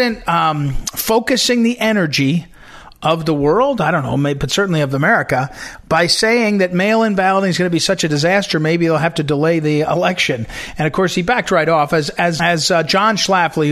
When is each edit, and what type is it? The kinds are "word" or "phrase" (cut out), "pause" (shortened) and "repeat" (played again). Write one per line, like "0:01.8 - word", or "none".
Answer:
0:12.4 - word